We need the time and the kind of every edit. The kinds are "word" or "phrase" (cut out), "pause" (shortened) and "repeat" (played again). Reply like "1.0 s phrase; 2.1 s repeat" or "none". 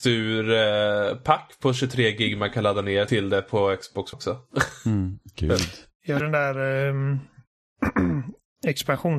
3.1 s word; 4.1 s word; 6.2 s word